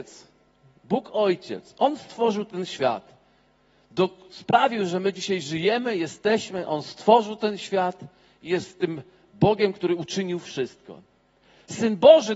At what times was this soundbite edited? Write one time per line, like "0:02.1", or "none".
none